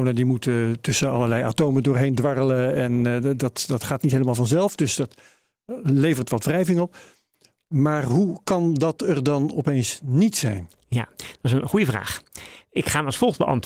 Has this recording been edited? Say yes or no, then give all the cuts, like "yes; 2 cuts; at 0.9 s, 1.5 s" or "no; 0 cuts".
no; 0 cuts